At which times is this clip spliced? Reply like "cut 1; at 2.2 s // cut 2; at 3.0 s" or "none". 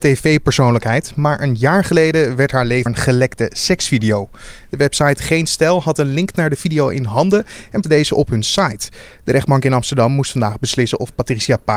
cut 1; at 2.9 s // cut 2; at 7.8 s